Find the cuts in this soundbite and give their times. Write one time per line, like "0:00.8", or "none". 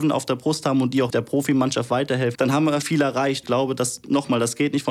0:01.1
0:02.4
0:02.8
0:03.4